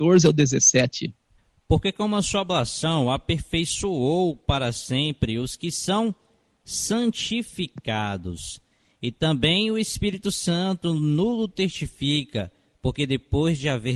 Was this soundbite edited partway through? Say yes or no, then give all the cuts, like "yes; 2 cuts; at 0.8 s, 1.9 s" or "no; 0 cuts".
no; 0 cuts